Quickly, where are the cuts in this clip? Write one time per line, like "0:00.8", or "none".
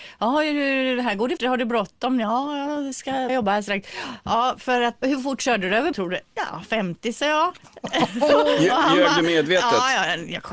0:01.4
0:03.3
0:05.0
0:05.9